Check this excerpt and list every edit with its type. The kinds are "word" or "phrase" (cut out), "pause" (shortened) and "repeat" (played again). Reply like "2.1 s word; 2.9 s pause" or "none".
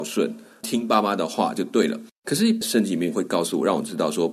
2.1 s pause